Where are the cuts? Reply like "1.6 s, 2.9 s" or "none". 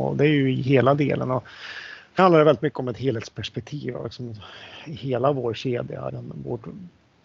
2.2 s, 6.1 s